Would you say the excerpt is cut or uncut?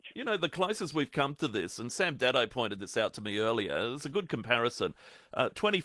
uncut